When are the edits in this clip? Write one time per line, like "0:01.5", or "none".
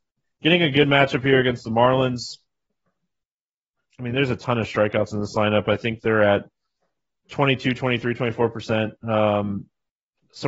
none